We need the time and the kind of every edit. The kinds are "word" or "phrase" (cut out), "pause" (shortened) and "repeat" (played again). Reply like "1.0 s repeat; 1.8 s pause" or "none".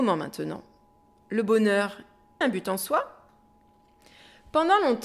2.4 s word

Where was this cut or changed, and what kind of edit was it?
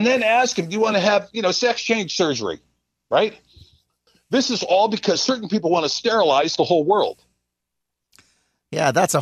none

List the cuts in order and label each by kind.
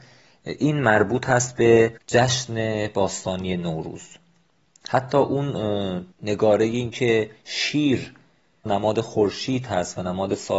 2.0 s pause; 6.1 s pause; 8.7 s phrase

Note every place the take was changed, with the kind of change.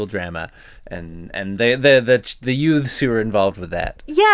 none

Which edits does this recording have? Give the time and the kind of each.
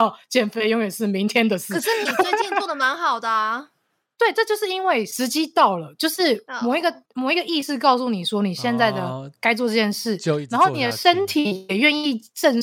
7.1 s pause

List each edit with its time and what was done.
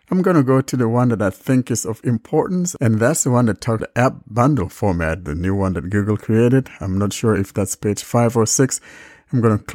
3.8 s word

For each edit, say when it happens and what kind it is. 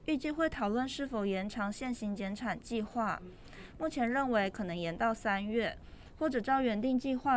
none

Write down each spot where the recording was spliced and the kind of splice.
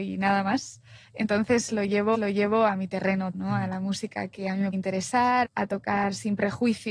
2.1 s repeat; 3.3 s word; 4.7 s word; 5.4 s word

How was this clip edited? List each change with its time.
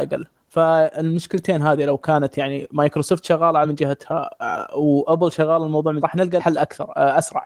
3.6 s word; 6.0 s word; 6.4 s word

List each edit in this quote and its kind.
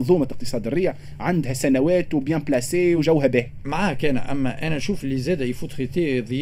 none

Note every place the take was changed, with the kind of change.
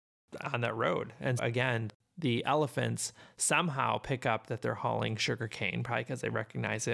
1.4 s word

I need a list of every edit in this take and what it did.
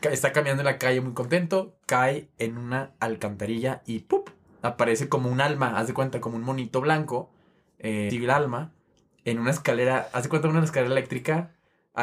8.1 s word

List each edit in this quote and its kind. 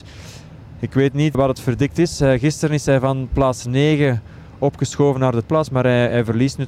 1.3 s word; 5.4 s word

